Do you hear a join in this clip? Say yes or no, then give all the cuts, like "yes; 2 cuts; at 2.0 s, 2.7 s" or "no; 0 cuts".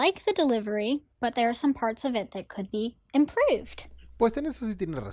yes; 1 cut; at 1.1 s